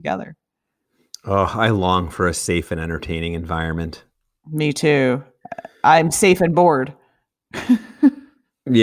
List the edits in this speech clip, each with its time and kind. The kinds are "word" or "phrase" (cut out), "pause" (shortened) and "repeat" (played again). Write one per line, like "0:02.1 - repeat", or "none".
none